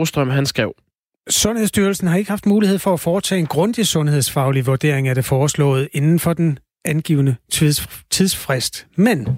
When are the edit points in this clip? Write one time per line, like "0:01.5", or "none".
none